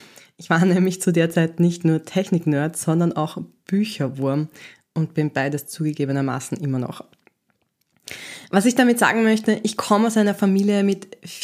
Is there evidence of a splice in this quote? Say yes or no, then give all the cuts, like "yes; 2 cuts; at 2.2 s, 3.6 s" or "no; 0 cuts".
no; 0 cuts